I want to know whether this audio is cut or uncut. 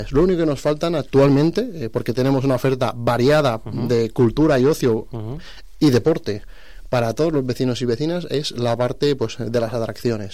uncut